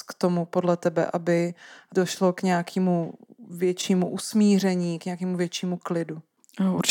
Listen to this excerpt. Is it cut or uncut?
uncut